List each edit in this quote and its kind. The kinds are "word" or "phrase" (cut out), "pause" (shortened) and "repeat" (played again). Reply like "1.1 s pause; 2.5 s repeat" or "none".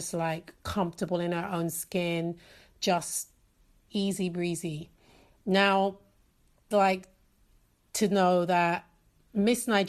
3.9 s word; 6.7 s phrase